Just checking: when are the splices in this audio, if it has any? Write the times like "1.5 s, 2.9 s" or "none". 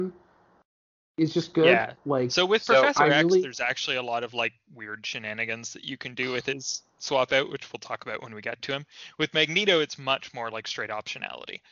none